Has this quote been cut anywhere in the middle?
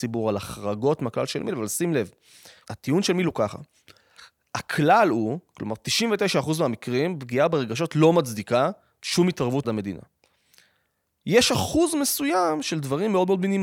yes; 1 cut; at 9.6 s

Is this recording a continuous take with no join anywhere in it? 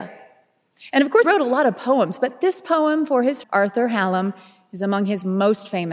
no; 2 cuts; at 1.2 s, 3.4 s

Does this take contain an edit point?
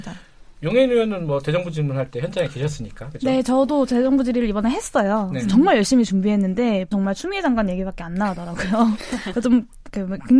yes; 1 cut; at 6.9 s

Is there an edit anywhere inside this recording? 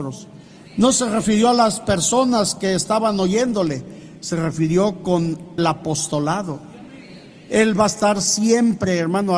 yes; 1 cut; at 5.6 s

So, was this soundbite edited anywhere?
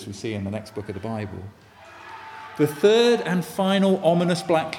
no; 0 cuts

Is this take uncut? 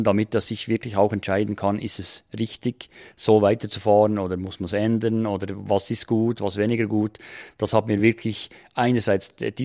yes; 0 cuts

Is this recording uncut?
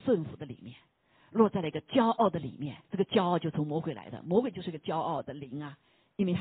no; 1 cut; at 2.8 s

